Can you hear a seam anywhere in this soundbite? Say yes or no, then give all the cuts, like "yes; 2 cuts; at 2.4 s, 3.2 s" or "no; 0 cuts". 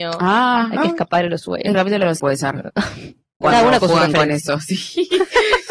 yes; 3 cuts; at 1.7 s, 2.2 s, 3.4 s